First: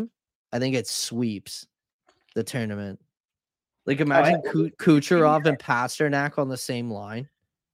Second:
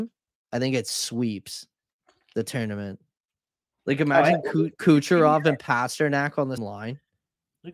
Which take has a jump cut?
second; 1 cut; at 6.6 s

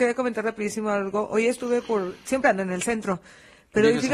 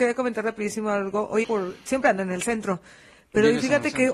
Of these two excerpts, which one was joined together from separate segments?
second; 1 cut; at 1.4 s

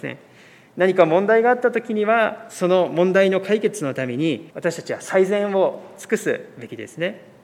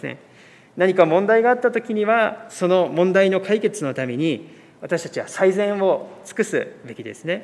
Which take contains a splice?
first; 1 cut; at 4.5 s

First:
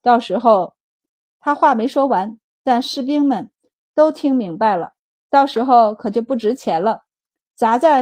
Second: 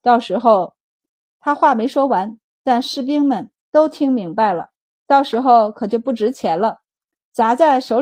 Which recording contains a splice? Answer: second; 1 cut; at 3.6 s

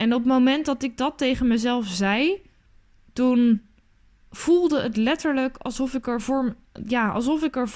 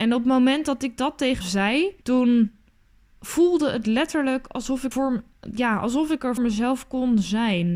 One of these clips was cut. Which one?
second; 4 cuts; at 1.4 s, 2.0 s, 4.9 s, 6.4 s

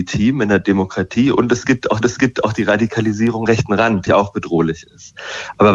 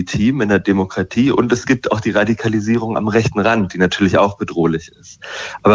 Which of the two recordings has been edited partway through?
first; 3 cuts; at 2.0 s, 3.5 s, 4.1 s

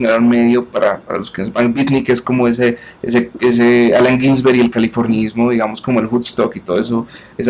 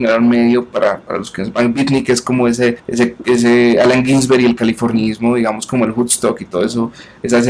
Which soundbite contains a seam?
second; 1 cut; at 2.8 s

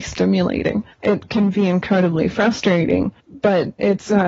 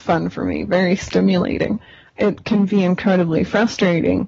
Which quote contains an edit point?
first; 2 cuts; at 0.9 s, 3.2 s

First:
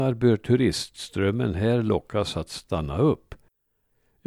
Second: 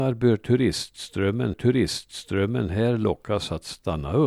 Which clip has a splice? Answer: second; 1 cut; at 1.5 s

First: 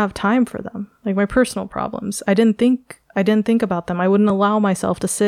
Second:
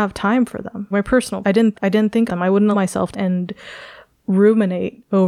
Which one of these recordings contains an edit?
second; 6 cuts; at 0.9 s, 1.4 s, 1.7 s, 2.3 s, 2.7 s, 3.1 s

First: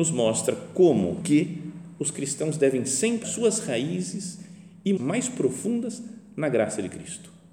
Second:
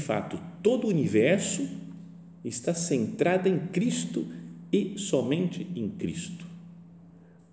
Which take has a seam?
first; 3 cuts; at 1.2 s, 3.2 s, 5.0 s

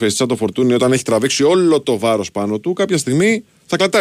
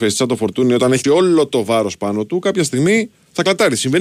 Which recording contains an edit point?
second; 1 cut; at 1.0 s

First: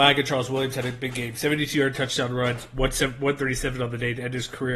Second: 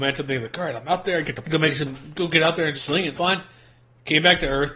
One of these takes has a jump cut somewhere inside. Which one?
second; 3 cuts; at 1.4 s, 2.7 s, 3.1 s

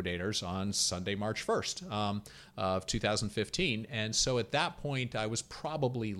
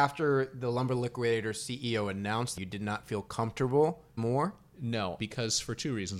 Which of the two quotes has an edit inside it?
second; 3 cuts; at 2.6 s, 4.2 s, 5.2 s

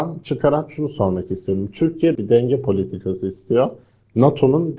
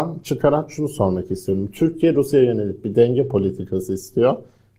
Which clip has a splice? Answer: first; 1 cut; at 2.1 s

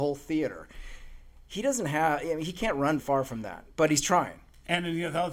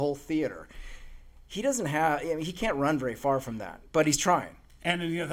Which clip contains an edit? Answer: first; 1 cut; at 3.0 s

